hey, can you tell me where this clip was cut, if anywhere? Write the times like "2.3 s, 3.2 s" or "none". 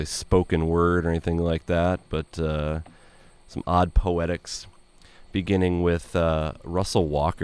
none